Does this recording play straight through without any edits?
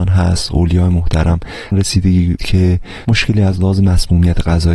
no; 3 cuts; at 1.7 s, 2.4 s, 3.0 s

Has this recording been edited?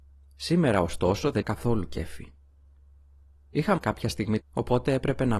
yes; 3 cuts; at 1.4 s, 3.8 s, 4.4 s

